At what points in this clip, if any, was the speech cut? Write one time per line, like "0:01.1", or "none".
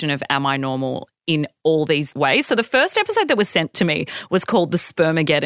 0:02.1